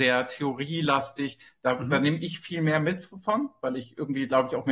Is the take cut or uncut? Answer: uncut